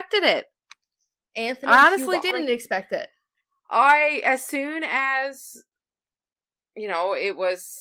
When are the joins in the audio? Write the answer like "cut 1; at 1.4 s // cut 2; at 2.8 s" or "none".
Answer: cut 1; at 2.3 s